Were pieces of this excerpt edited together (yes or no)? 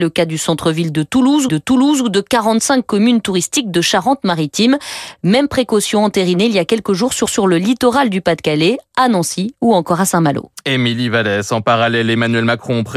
yes